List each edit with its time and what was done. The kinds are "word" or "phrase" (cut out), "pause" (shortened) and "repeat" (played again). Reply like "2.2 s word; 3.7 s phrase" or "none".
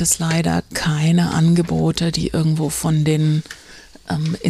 none